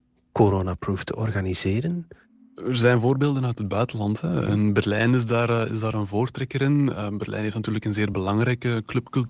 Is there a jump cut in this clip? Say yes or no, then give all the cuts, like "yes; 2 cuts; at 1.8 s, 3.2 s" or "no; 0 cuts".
no; 0 cuts